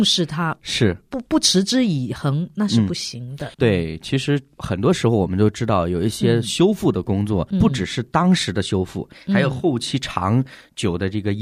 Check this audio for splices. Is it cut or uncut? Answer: cut